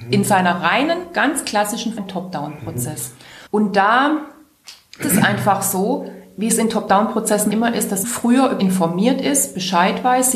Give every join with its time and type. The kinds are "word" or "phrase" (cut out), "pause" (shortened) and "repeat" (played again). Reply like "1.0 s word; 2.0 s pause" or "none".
2.0 s word; 3.5 s pause; 5.0 s word; 7.5 s word; 8.0 s word; 8.6 s word